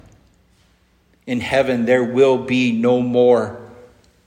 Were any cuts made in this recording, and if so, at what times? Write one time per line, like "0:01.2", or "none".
none